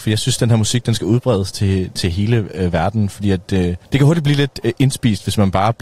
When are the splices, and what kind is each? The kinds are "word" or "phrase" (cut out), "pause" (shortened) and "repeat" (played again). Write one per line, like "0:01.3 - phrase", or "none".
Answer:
0:03.8 - pause

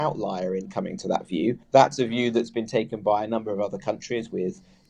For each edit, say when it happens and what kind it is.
0:01.6 - pause

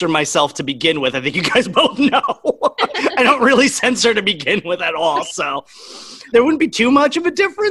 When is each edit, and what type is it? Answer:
none

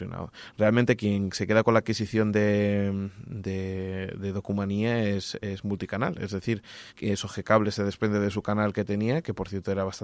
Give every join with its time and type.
0:06.9 - pause

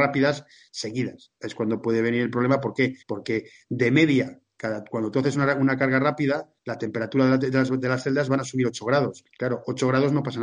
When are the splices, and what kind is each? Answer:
0:03.0 - pause
0:06.6 - pause
0:09.3 - pause

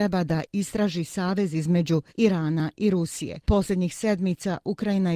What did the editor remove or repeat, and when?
0:02.1 - pause
0:03.4 - pause

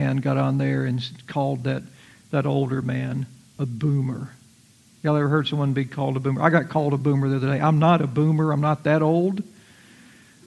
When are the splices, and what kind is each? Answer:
none

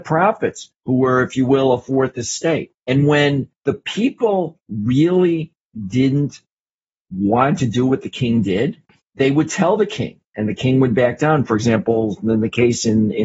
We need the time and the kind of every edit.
none

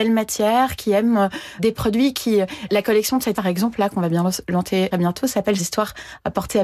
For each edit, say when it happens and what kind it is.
0:01.6 - word
0:02.7 - word
0:03.3 - word
0:04.9 - phrase
0:05.6 - phrase

